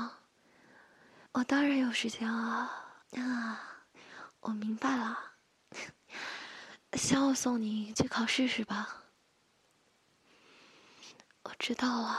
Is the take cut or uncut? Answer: cut